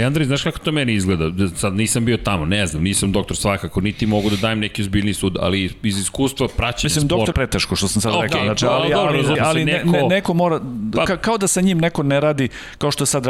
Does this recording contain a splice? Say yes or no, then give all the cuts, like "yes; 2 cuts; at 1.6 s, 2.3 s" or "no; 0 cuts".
yes; 2 cuts; at 7.3 s, 9.3 s